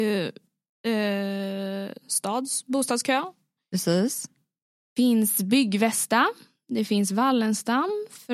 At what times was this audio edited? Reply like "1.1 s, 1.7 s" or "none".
2.0 s

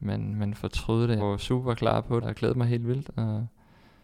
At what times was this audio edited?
1.2 s, 2.2 s

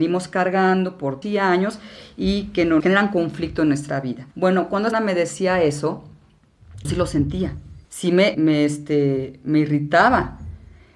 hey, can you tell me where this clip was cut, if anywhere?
1.2 s, 2.8 s, 4.3 s, 4.9 s, 6.8 s, 7.8 s, 8.3 s

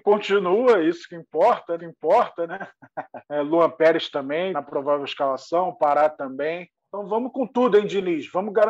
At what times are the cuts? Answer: 1.8 s, 3.2 s, 4.5 s, 6.8 s

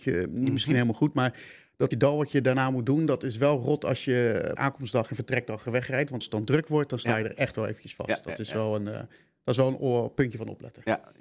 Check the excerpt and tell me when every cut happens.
1.9 s, 4.6 s, 6.2 s

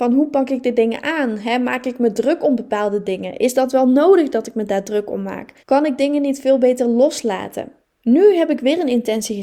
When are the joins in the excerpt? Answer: 5.6 s, 7.8 s

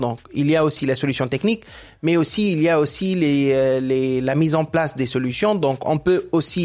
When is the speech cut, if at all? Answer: none

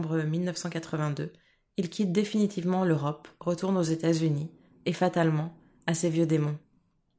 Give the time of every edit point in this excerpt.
none

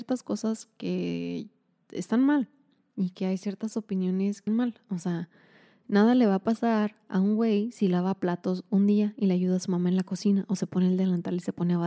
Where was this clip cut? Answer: 4.5 s

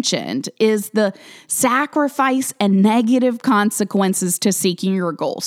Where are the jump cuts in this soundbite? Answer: none

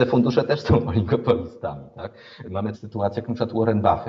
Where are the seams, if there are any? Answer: 2.7 s

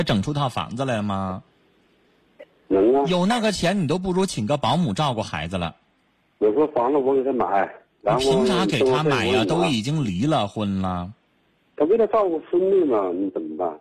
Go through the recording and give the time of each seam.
none

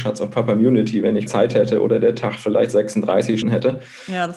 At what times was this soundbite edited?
1.3 s, 3.4 s

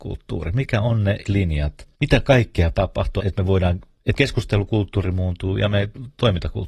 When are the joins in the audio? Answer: 1.2 s, 1.9 s, 2.7 s, 3.2 s, 4.2 s

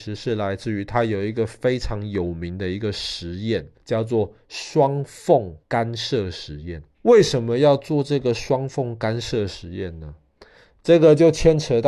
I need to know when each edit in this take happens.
3.7 s, 5.6 s, 6.9 s

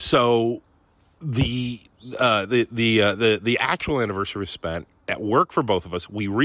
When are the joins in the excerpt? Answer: none

